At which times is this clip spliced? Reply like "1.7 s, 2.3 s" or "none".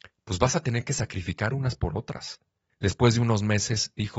none